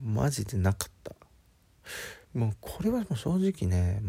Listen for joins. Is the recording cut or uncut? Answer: cut